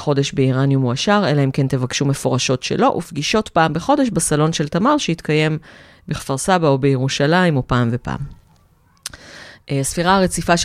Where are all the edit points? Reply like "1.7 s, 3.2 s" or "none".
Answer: none